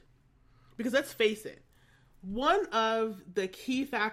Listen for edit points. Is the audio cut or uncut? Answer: uncut